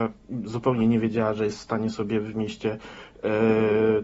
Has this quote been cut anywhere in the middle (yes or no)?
no